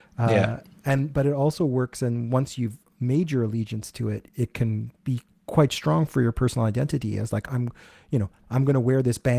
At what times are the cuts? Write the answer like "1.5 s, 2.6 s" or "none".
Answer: none